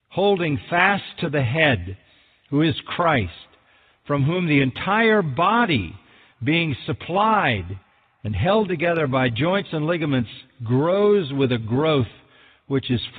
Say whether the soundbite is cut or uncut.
uncut